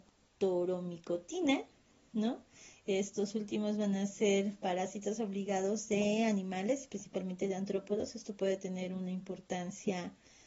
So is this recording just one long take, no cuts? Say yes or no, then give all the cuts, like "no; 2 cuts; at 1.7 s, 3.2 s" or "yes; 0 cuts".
yes; 0 cuts